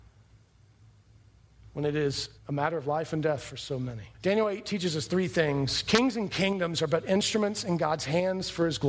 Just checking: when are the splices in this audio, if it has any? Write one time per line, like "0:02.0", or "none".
0:02.4
0:04.1